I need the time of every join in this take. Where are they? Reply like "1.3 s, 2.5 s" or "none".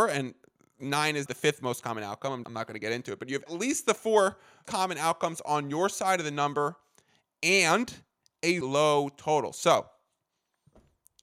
1.3 s, 2.4 s, 3.5 s, 4.6 s, 8.6 s